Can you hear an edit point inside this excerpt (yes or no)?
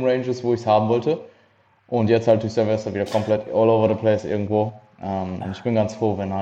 no